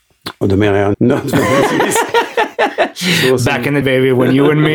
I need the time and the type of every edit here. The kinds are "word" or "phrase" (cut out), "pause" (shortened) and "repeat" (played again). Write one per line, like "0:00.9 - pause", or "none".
0:00.9 - word
0:03.8 - word